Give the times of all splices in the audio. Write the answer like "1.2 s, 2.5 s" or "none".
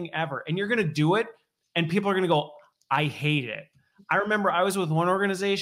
none